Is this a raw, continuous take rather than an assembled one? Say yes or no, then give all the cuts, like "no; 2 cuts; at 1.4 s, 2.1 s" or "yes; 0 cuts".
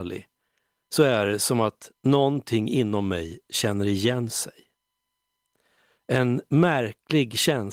yes; 0 cuts